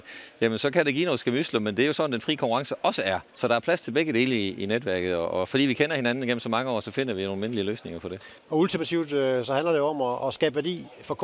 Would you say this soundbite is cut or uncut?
cut